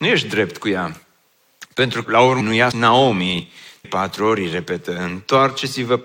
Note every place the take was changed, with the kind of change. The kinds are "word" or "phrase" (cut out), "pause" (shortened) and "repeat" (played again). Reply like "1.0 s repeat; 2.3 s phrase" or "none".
2.0 s word; 2.4 s word; 2.7 s word; 3.8 s word